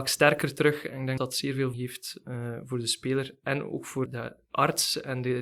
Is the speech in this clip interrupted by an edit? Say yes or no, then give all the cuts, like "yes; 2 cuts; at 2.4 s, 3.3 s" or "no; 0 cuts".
yes; 3 cuts; at 1.2 s, 1.7 s, 4.1 s